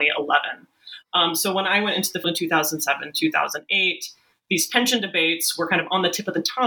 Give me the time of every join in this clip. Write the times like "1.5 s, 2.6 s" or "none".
2.2 s